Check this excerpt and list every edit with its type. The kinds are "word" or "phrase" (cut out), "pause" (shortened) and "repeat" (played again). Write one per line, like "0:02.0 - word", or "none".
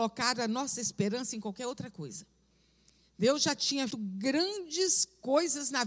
0:03.9 - word